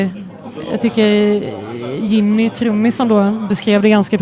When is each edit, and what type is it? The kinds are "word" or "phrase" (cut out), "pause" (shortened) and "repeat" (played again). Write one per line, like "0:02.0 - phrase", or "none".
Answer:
none